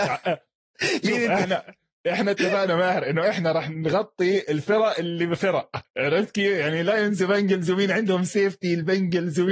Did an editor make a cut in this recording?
no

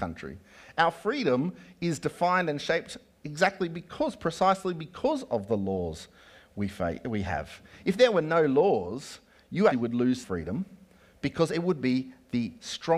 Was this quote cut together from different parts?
yes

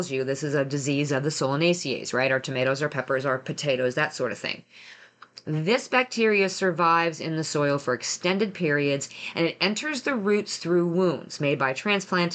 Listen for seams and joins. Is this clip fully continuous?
yes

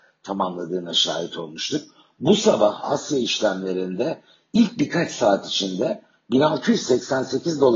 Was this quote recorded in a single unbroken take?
yes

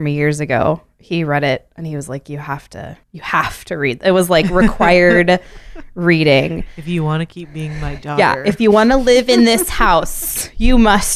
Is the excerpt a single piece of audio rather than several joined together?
no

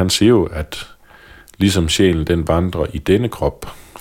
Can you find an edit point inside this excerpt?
no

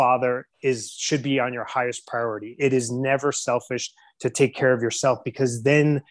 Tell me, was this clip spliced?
no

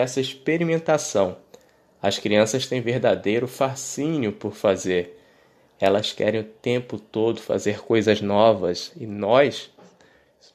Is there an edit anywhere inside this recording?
no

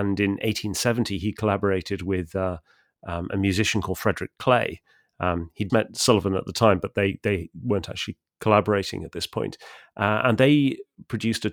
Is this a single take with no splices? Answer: no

